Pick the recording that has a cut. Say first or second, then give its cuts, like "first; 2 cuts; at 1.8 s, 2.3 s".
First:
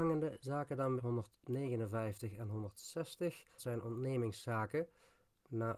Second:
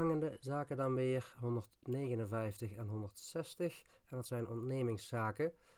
first; 2 cuts; at 1.0 s, 3.6 s